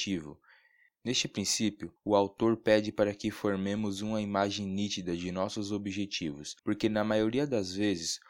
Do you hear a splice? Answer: yes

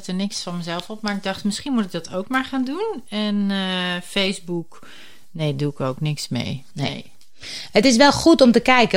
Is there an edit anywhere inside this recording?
no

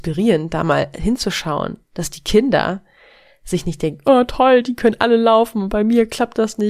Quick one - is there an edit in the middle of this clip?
no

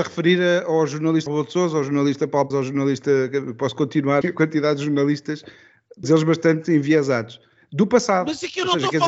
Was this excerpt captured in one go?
no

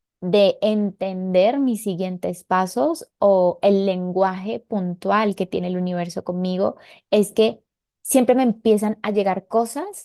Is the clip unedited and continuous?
yes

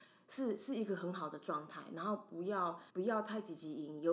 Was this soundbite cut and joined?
yes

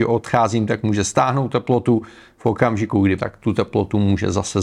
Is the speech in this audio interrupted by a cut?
yes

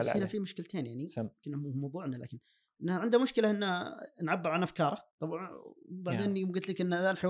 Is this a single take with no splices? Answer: no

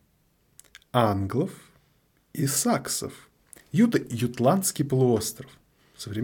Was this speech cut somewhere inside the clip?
no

